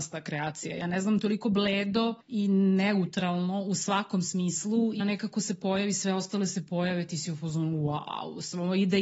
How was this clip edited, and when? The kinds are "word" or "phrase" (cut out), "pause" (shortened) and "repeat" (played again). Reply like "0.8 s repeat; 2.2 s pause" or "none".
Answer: 1.2 s word; 2.2 s pause; 5.0 s word